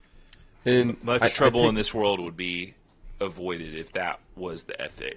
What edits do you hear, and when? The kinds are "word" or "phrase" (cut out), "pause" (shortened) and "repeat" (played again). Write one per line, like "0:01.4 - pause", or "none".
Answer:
none

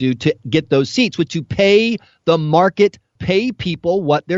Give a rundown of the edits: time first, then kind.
0:01.3 - word
0:03.2 - word

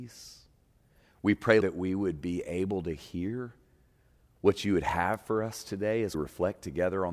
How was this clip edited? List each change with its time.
0:01.6 - word
0:06.1 - word

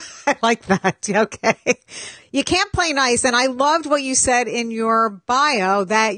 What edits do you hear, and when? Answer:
none

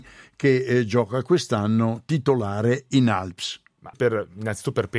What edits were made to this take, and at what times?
0:03.9 - word

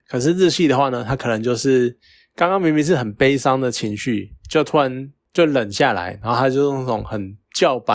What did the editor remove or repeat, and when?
none

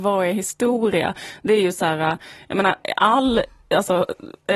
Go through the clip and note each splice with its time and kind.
none

